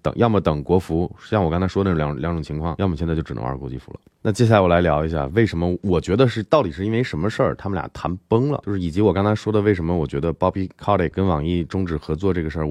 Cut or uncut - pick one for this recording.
uncut